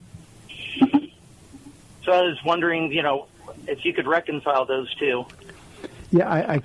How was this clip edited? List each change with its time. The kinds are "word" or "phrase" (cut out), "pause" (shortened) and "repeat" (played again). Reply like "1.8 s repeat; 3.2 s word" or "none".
none